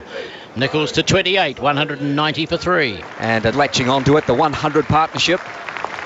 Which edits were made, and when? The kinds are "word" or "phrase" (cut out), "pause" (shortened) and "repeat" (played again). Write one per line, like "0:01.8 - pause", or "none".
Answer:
0:03.5 - word